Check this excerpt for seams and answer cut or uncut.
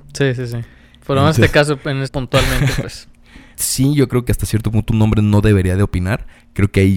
cut